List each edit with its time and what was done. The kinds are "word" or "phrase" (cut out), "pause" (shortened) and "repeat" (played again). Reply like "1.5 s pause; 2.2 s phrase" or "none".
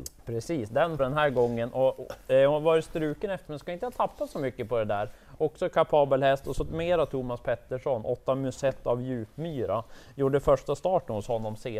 1.0 s word; 3.5 s word